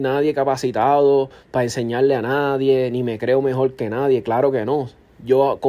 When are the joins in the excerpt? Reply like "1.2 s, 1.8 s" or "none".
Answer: none

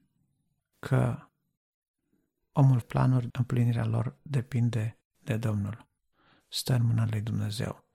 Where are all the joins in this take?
2.8 s, 3.3 s

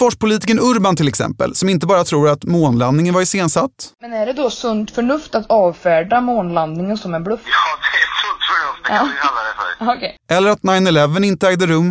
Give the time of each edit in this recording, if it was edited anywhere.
none

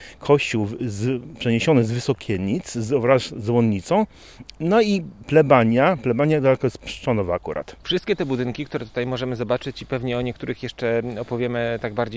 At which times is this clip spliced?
none

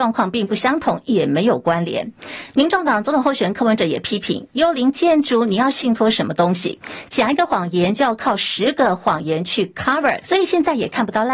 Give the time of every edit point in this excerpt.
10.2 s

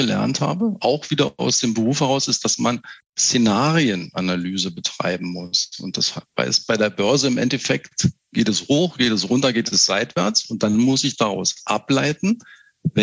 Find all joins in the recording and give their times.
3.0 s

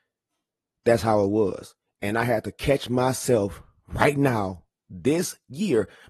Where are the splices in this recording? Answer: none

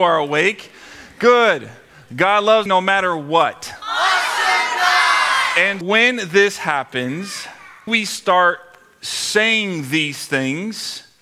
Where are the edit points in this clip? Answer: 2.7 s, 5.8 s, 7.9 s

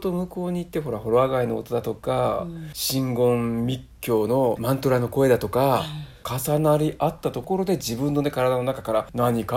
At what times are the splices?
4.6 s

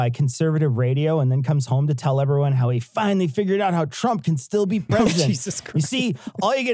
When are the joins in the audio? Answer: none

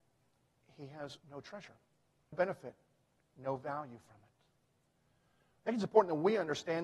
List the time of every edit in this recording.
1.2 s, 2.3 s

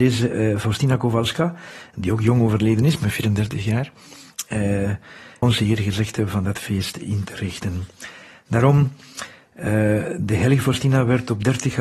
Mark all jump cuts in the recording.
5.4 s

